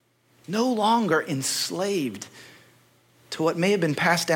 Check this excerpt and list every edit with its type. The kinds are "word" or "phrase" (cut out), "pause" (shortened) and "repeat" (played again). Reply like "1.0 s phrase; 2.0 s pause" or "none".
none

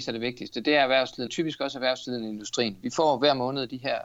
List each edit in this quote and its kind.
1.3 s phrase

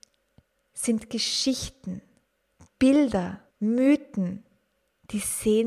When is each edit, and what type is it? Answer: 3.5 s pause

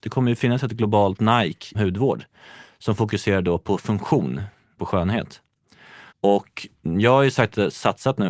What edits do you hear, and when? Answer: 1.7 s word; 4.8 s phrase; 6.1 s pause

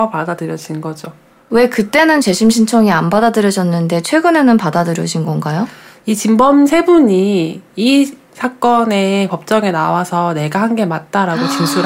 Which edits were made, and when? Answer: none

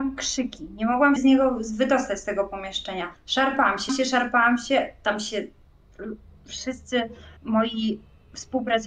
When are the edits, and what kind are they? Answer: 1.2 s word; 3.2 s pause; 3.9 s word; 7.4 s pause

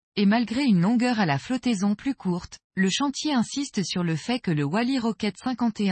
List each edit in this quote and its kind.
2.6 s pause

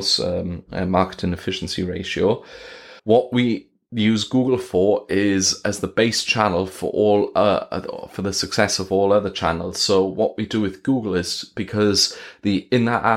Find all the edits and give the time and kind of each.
3.0 s pause

